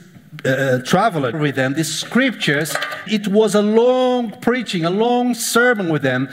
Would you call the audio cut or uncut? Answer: cut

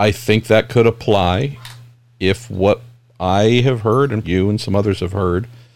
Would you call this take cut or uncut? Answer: cut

